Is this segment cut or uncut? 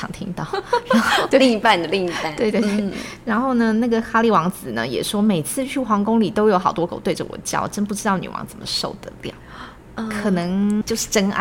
cut